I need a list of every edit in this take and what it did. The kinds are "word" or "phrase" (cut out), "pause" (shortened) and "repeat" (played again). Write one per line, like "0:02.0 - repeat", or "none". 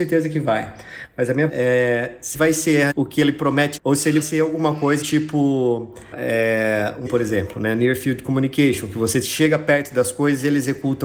0:01.5 - word
0:02.3 - word
0:02.9 - word
0:03.8 - word
0:04.2 - word
0:05.0 - word
0:06.1 - word
0:07.1 - word